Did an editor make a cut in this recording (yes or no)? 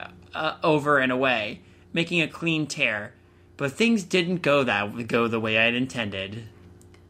no